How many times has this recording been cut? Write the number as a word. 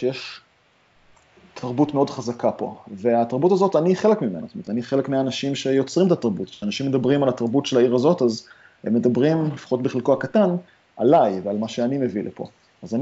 zero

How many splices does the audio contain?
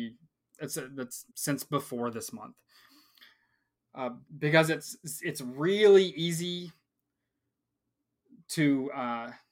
two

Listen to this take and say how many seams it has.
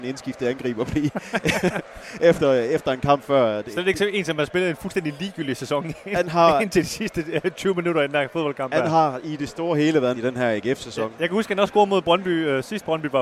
one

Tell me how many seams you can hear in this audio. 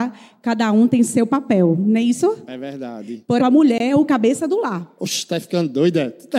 one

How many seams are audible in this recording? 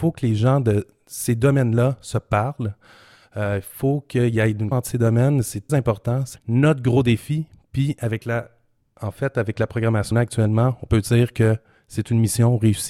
four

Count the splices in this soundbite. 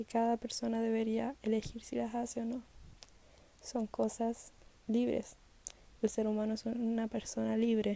zero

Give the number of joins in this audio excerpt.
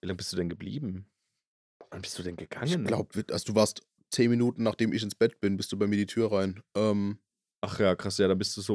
zero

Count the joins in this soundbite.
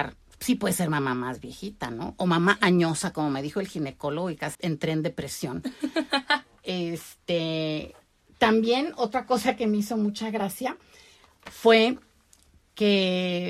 one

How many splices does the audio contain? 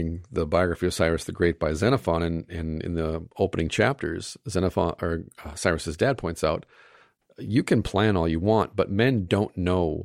zero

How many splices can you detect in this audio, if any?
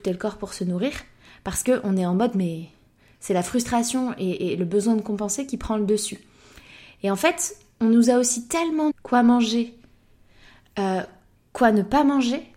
one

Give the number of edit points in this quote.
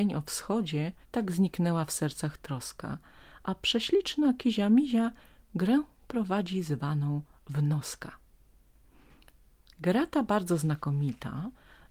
one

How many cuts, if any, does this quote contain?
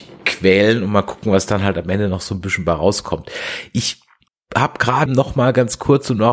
two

